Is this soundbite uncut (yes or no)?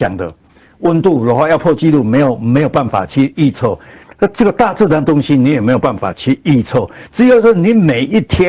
yes